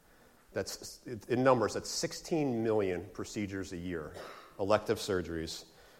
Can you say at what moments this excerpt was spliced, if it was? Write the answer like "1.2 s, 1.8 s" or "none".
none